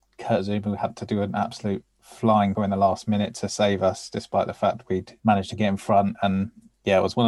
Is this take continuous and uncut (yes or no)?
no